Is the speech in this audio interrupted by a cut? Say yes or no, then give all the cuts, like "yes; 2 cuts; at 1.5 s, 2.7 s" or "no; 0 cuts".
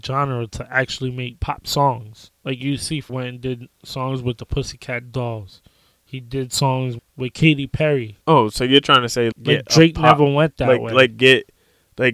yes; 4 cuts; at 3.1 s, 7.0 s, 8.2 s, 9.3 s